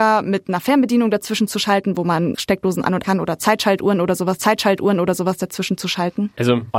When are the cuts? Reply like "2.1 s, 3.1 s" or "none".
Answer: 2.3 s, 3.0 s, 4.4 s